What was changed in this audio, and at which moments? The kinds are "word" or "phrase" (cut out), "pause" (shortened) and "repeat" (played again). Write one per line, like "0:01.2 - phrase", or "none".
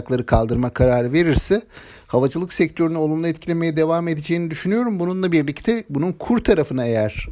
none